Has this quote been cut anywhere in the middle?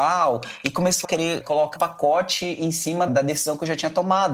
yes; 4 cuts; at 1.0 s, 1.4 s, 1.8 s, 3.1 s

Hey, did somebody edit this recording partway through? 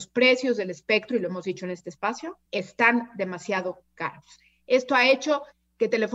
yes; 1 cut; at 2.5 s

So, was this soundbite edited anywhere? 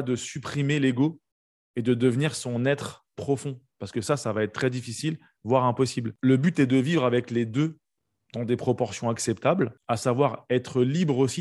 no; 0 cuts

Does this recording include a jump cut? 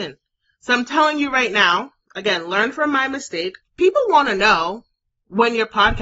yes; 1 cut; at 3.6 s

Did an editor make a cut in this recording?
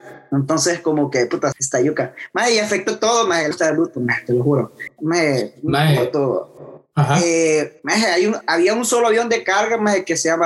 yes; 3 cuts; at 1.5 s, 3.5 s, 7.8 s

